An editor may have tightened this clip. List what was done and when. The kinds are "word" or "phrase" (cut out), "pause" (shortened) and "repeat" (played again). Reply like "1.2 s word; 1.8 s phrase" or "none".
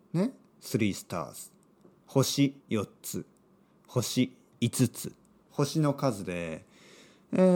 2.6 s pause; 5.5 s word